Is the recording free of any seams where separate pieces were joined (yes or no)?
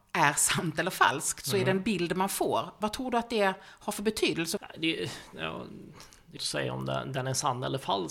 no